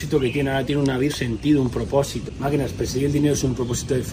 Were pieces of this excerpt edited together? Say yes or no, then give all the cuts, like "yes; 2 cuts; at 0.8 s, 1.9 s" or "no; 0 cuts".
yes; 1 cut; at 1.1 s